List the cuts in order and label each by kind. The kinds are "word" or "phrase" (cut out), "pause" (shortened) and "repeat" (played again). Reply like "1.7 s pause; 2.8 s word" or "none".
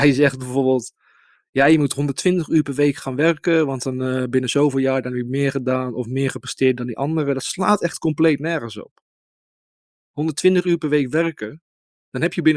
none